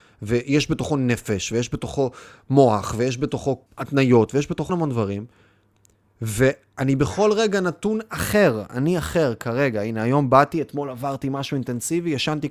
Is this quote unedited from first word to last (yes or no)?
no